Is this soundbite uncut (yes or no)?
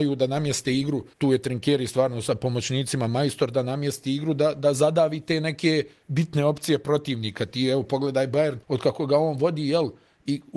no